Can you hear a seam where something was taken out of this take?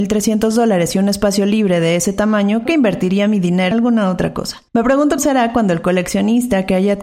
yes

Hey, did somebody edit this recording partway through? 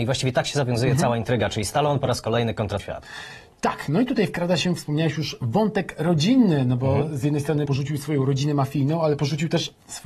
yes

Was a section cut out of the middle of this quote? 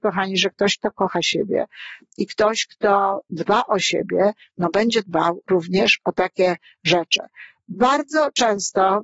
no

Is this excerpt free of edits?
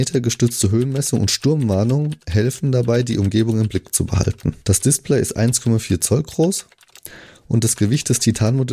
no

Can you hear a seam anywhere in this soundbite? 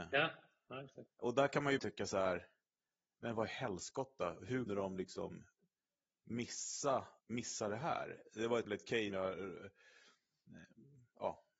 yes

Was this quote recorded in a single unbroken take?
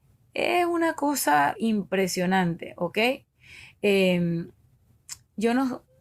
no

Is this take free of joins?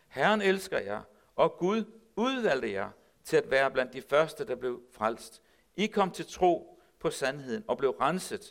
yes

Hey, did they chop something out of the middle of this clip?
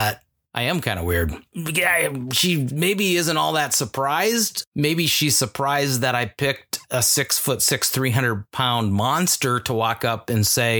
yes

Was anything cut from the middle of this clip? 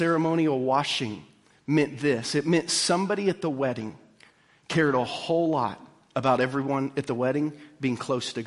no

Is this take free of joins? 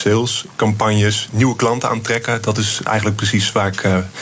yes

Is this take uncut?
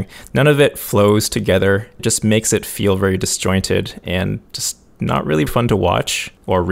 no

